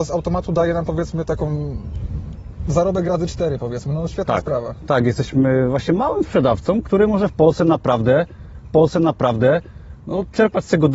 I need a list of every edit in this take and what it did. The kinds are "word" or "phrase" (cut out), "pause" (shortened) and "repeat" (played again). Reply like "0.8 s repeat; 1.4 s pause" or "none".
6.8 s word; 8.6 s repeat